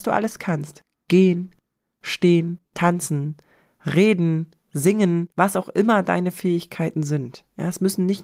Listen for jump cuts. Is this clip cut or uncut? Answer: cut